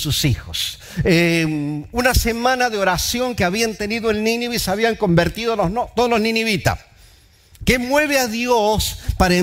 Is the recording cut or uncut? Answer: uncut